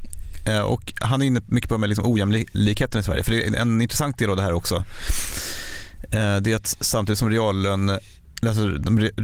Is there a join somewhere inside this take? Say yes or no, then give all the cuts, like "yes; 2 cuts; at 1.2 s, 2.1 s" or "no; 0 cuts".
no; 0 cuts